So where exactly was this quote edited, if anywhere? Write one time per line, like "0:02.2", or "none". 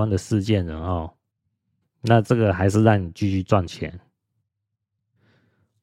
none